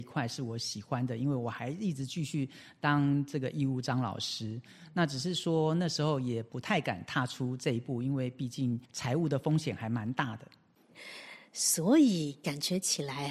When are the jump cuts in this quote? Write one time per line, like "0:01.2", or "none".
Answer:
0:08.8